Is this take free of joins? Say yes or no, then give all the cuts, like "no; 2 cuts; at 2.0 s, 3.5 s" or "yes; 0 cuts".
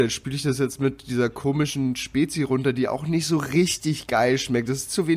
yes; 0 cuts